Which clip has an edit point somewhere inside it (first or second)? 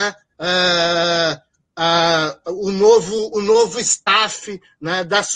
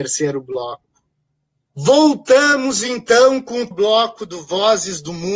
second